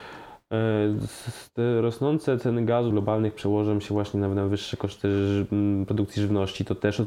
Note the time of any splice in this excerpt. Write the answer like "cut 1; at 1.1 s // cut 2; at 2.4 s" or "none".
cut 1; at 2.9 s